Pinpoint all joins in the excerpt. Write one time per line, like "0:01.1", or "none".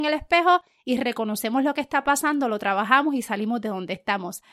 none